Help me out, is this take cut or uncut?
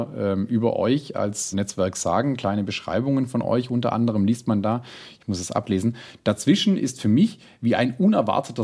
cut